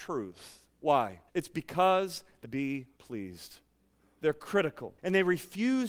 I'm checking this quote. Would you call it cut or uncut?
cut